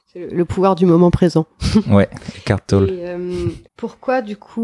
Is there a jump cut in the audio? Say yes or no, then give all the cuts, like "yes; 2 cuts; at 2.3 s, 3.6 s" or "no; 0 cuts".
yes; 1 cut; at 3.6 s